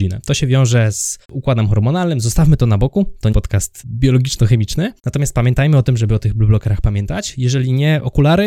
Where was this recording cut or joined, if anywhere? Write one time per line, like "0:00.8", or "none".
0:01.2
0:03.3
0:05.0